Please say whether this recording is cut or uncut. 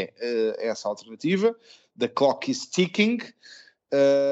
uncut